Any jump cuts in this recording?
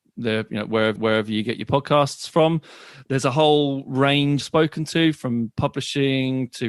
yes; 2 cuts; at 1.0 s, 4.4 s

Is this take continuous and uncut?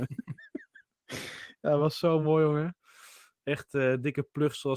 yes; 0 cuts

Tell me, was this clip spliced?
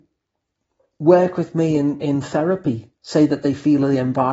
yes; 1 cut; at 3.0 s

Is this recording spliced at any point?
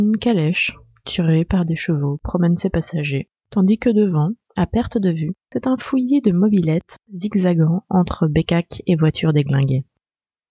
yes; 2 cuts; at 3.4 s, 5.4 s

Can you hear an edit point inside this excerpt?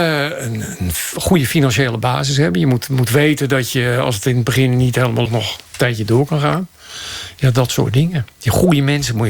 yes; 2 cuts; at 5.3 s, 5.7 s

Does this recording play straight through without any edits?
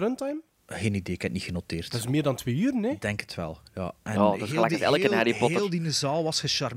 yes; 0 cuts

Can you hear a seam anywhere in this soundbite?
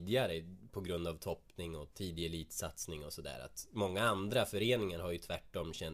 no; 0 cuts

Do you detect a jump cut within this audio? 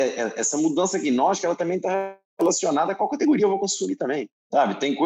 no; 0 cuts

